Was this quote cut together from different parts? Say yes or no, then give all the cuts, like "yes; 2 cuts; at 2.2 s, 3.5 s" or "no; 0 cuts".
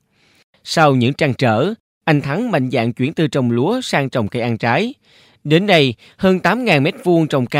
no; 0 cuts